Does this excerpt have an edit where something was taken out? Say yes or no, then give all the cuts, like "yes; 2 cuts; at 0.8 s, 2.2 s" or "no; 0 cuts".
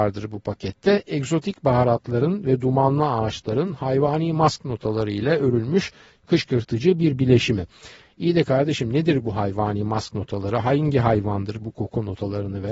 no; 0 cuts